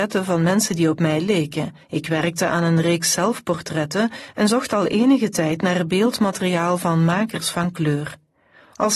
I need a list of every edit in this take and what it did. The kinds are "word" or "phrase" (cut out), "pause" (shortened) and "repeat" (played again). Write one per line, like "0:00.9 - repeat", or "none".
0:01.8 - pause